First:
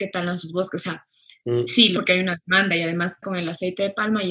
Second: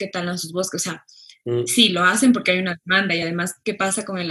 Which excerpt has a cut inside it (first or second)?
first